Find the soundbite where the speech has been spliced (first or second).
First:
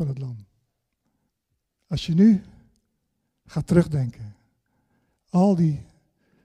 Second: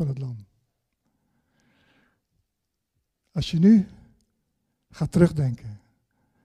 first